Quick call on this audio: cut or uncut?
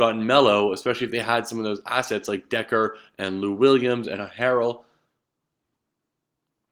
uncut